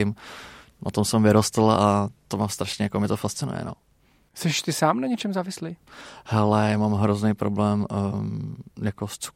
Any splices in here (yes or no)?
no